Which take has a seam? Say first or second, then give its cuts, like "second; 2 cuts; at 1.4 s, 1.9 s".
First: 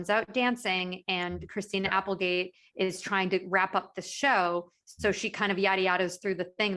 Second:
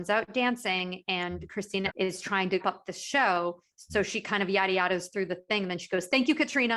second; 2 cuts; at 1.9 s, 2.6 s